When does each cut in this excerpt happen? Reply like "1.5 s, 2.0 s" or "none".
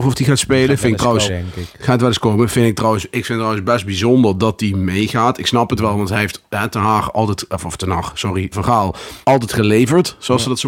1.3 s, 8.5 s, 9.2 s